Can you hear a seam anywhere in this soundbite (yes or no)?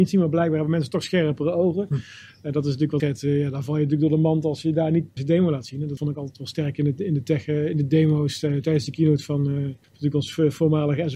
yes